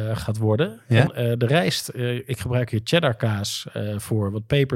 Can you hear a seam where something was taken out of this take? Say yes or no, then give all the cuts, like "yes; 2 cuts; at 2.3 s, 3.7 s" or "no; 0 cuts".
yes; 1 cut; at 1.1 s